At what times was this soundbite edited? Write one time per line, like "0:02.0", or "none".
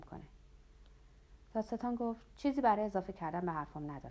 none